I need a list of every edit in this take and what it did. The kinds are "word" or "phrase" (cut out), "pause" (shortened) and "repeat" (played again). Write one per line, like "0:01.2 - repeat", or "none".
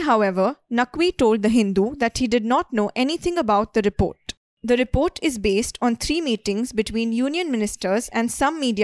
none